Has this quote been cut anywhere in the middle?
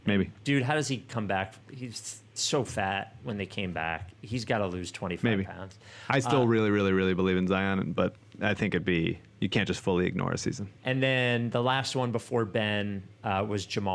yes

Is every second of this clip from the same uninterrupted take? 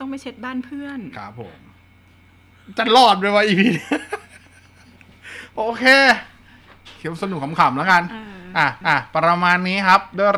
no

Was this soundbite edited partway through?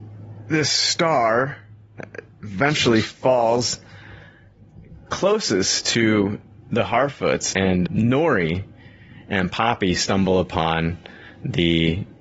yes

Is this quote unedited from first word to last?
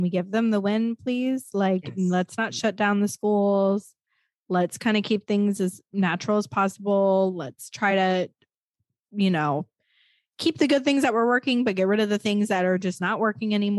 yes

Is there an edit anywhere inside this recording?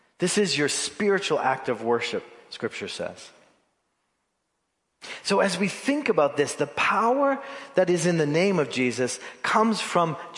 no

